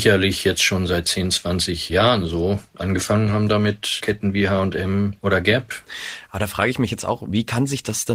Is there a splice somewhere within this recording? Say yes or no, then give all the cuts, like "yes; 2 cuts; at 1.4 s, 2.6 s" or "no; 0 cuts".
no; 0 cuts